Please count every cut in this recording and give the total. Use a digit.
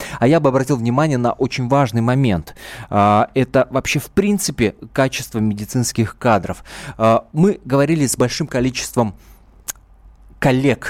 0